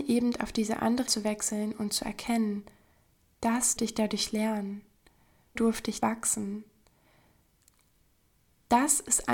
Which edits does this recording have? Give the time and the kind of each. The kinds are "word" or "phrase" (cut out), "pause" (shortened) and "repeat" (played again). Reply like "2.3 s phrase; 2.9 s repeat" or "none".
1.1 s word; 3.8 s word; 5.6 s word; 6.0 s word